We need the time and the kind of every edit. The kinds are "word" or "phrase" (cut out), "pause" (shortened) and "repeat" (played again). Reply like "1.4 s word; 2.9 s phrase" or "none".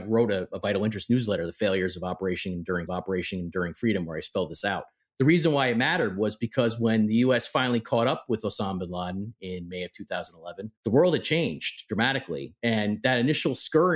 2.9 s repeat; 5.0 s pause; 10.8 s pause